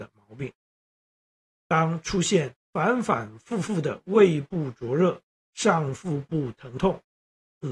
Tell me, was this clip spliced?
yes; 2 cuts; at 2.6 s, 5.3 s

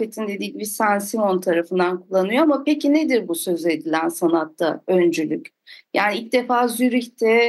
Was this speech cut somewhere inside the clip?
no; 0 cuts

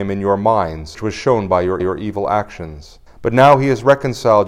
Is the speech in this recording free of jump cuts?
no; 3 cuts; at 0.9 s, 1.8 s, 3.1 s

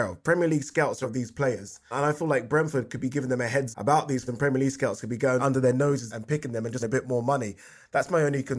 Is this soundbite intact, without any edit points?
no; 7 cuts; at 1.0 s, 1.9 s, 3.7 s, 4.3 s, 5.4 s, 6.1 s, 6.8 s

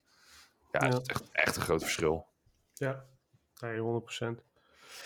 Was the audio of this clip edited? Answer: no; 0 cuts

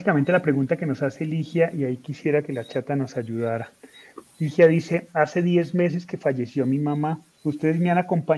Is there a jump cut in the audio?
yes; 1 cut; at 7.3 s

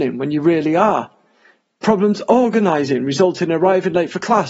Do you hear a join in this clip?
no; 0 cuts

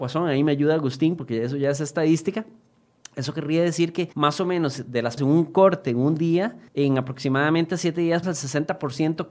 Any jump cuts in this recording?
yes; 4 cuts; at 4.1 s, 5.2 s, 6.7 s, 8.2 s

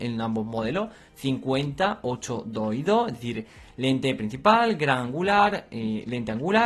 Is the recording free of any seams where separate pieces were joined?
yes; 0 cuts

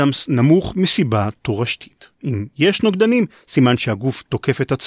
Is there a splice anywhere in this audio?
yes; 1 cut; at 2.1 s

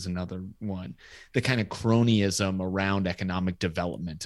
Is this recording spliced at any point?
no; 0 cuts

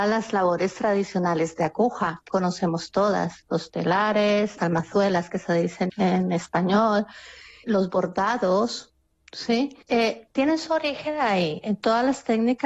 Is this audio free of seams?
no; 5 cuts; at 2.3 s, 4.6 s, 5.9 s, 7.6 s, 9.8 s

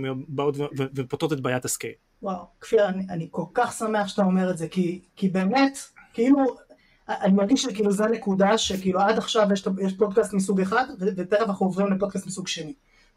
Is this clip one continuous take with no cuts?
yes; 0 cuts

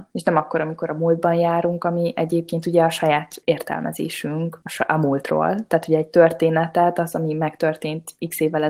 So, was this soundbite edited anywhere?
no; 0 cuts

